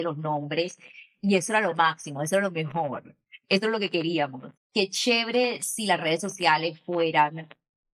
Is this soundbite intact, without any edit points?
no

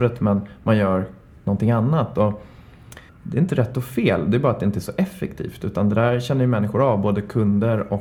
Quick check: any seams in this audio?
yes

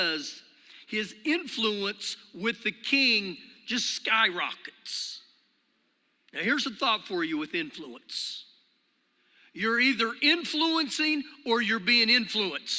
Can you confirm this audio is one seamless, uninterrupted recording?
yes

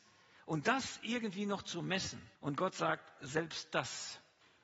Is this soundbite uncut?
no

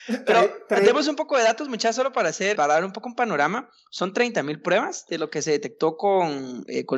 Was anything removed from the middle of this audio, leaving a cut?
yes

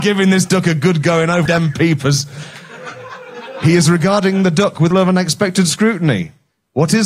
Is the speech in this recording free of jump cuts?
no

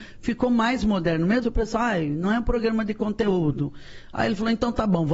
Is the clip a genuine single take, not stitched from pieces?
no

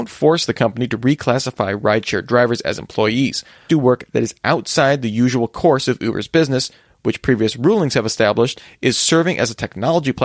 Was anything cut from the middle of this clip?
yes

